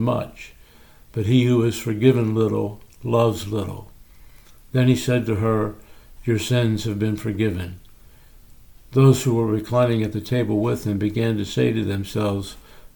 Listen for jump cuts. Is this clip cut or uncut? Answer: uncut